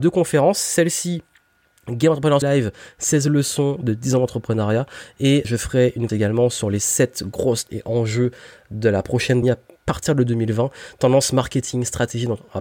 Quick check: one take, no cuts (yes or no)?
no